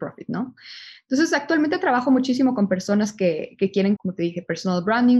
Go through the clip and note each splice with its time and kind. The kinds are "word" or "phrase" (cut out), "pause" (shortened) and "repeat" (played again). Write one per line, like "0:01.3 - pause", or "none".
0:04.0 - word